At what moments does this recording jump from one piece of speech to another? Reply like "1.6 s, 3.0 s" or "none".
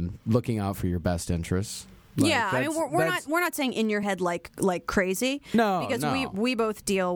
none